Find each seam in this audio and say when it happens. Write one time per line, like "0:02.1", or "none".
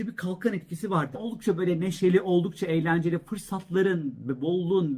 0:01.1

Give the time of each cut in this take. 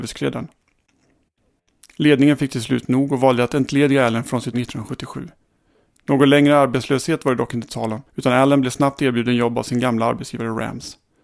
0:04.5
0:08.1

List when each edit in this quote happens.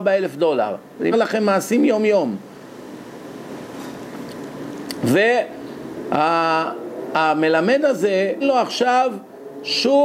0:01.1
0:08.4

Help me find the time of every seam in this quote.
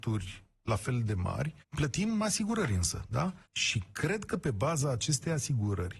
0:01.6
0:03.5

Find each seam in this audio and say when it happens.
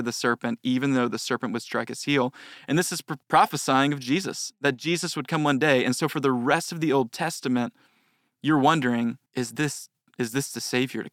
0:03.2
0:09.3

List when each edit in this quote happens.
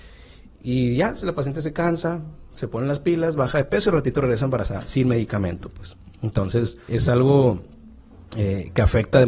0:06.9

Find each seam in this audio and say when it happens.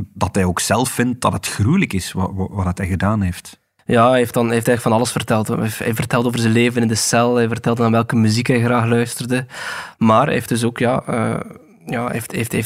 none

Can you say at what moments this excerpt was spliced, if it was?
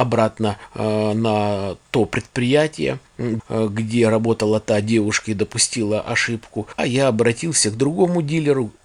0:03.4
0:06.8

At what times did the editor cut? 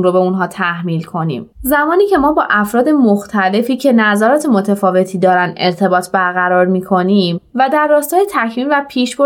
0:01.5

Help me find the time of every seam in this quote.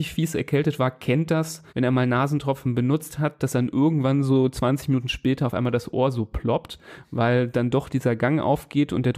0:01.7

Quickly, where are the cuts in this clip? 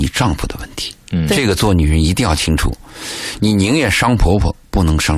0:01.0

